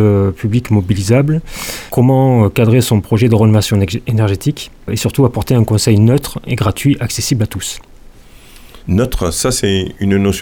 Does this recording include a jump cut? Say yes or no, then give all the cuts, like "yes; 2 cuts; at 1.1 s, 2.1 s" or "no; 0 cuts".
yes; 2 cuts; at 4.8 s, 8.8 s